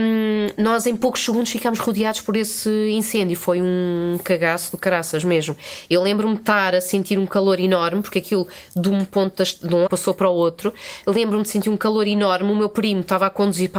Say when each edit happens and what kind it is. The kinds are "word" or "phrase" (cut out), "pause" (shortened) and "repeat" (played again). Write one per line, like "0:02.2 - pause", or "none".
0:09.9 - phrase